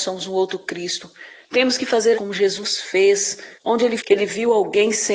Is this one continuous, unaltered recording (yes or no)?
no